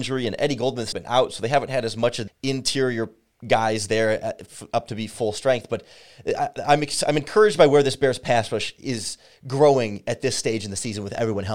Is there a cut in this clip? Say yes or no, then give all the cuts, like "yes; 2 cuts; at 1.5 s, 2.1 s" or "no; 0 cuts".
yes; 2 cuts; at 0.9 s, 2.3 s